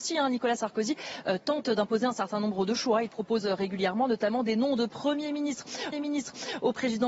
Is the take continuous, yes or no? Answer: no